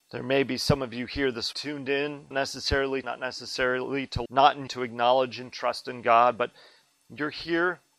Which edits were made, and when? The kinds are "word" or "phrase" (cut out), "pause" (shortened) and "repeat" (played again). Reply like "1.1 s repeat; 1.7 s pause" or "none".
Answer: 1.5 s phrase; 2.3 s word; 3.0 s phrase; 4.3 s word; 4.7 s word